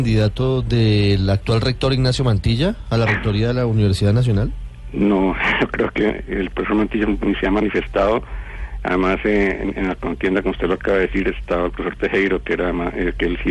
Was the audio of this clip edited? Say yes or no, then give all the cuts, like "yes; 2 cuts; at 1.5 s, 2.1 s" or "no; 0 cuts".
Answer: no; 0 cuts